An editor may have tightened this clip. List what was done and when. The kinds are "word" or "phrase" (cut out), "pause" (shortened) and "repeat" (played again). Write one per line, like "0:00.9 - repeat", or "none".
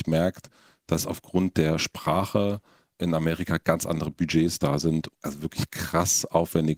0:05.1 - word

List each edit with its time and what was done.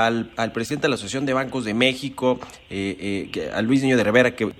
none

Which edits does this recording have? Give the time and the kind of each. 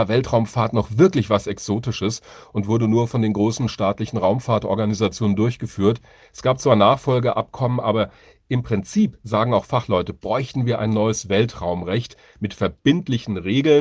none

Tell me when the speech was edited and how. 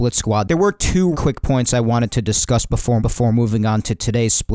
0:01.1 - word
0:03.0 - repeat

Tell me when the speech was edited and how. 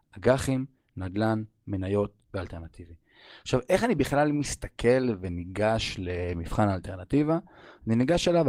none

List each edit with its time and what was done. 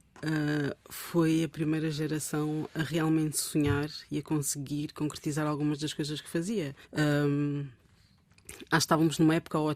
0:06.8 - pause

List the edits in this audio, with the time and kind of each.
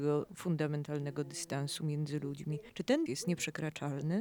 0:02.7 - pause
0:03.1 - word

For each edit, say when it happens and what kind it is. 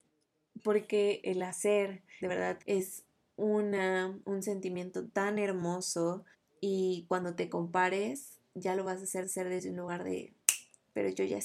0:01.2 - word
0:02.2 - phrase
0:02.6 - pause
0:04.2 - pause
0:06.3 - pause
0:09.2 - repeat

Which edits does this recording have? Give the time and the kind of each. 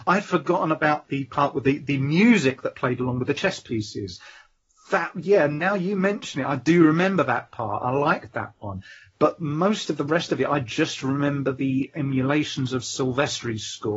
none

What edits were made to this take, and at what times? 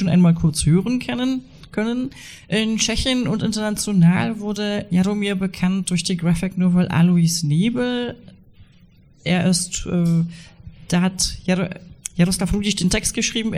none

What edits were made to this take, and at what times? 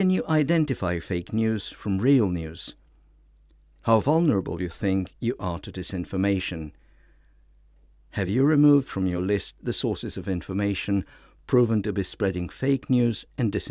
none

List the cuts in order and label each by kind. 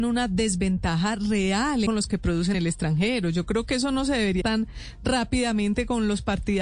0:01.9 - phrase
0:02.5 - word
0:04.4 - word

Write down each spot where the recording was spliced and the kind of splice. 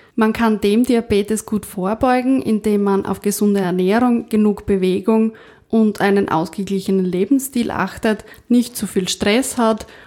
none

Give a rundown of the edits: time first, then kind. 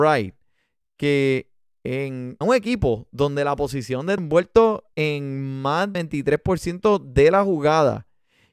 0:02.4 - word
0:04.2 - phrase
0:04.9 - pause
0:05.9 - word

